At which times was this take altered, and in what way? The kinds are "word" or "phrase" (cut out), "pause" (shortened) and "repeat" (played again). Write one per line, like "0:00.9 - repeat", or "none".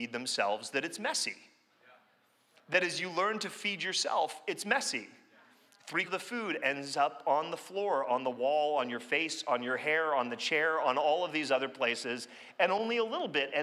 0:06.1 - word